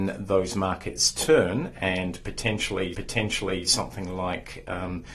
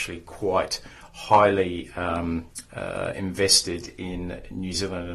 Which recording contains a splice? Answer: first; 1 cut; at 2.9 s

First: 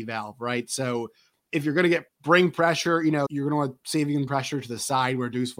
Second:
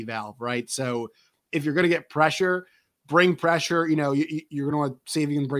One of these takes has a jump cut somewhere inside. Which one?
first; 3 cuts; at 2.1 s, 3.3 s, 4.3 s

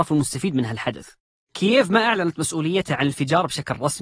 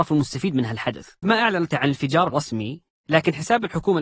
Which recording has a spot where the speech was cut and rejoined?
second; 3 cuts; at 1.2 s, 1.7 s, 2.3 s

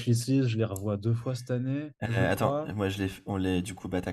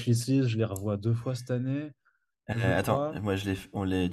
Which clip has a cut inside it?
first; 1 cut; at 1.9 s

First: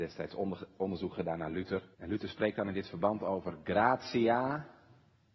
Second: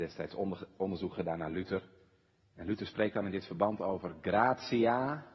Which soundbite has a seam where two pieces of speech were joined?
first; 1 cut; at 1.9 s

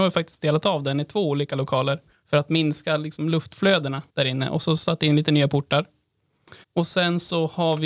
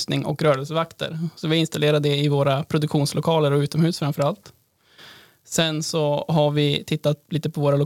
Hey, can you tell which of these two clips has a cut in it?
first; 3 cuts; at 2.1 s, 4.1 s, 6.6 s

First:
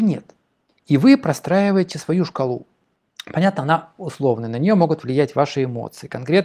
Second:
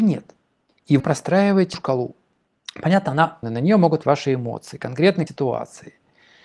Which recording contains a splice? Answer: second; 5 cuts; at 1.0 s, 1.7 s, 3.4 s, 4.0 s, 5.3 s

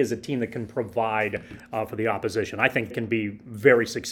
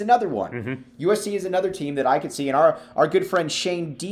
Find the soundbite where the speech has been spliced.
first; 2 cuts; at 1.6 s, 2.9 s

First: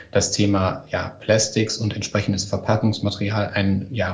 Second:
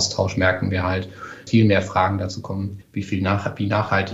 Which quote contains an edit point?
second; 2 cuts; at 1.5 s, 2.8 s

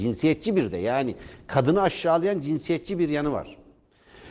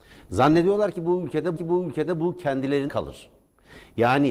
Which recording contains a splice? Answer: second; 2 cuts; at 1.6 s, 2.9 s

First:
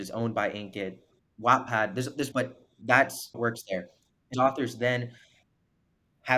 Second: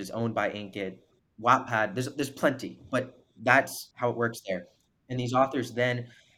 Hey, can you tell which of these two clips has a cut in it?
first; 3 cuts; at 2.3 s, 3.3 s, 4.3 s

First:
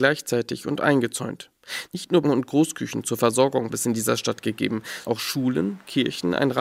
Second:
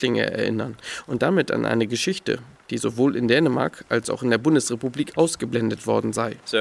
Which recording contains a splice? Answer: first; 3 cuts; at 2.2 s, 3.7 s, 5.1 s

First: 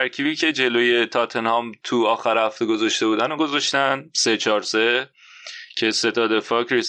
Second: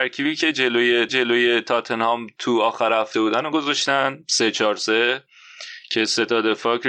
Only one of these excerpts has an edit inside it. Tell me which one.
second; 2 cuts; at 1.1 s, 3.1 s

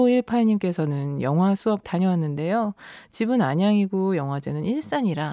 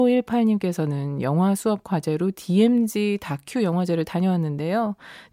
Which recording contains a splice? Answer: first; 1 cut; at 1.8 s

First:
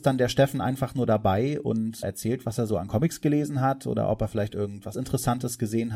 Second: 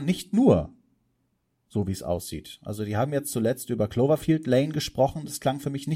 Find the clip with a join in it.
first; 2 cuts; at 2.0 s, 4.9 s

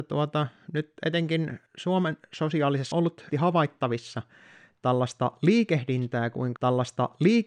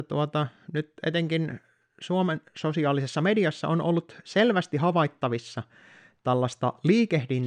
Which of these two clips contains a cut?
first; 4 cuts; at 1.7 s, 2.9 s, 3.3 s, 6.6 s

